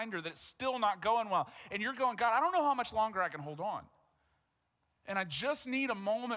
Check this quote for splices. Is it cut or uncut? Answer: uncut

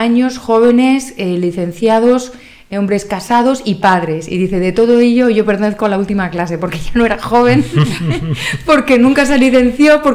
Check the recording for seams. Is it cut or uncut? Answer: uncut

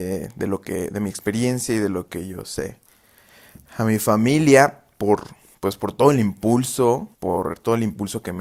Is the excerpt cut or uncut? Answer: cut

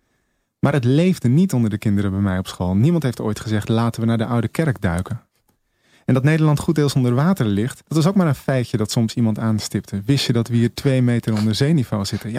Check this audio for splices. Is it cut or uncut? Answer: cut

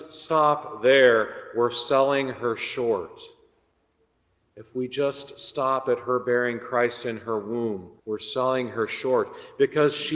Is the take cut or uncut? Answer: cut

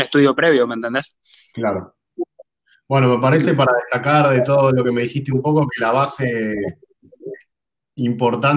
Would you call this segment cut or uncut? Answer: uncut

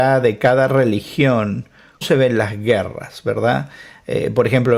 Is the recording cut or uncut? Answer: cut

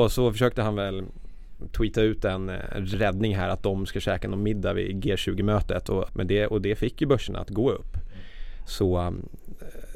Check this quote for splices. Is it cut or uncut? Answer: uncut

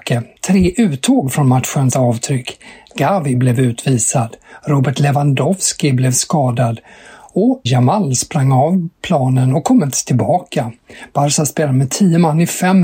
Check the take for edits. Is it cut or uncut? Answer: cut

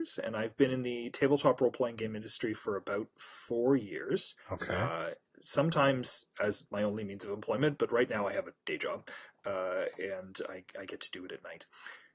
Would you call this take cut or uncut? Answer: cut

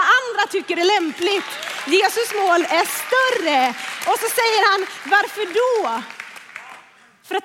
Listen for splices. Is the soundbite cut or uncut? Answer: uncut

